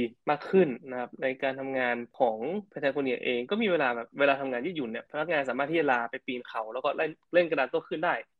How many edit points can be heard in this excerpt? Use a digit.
1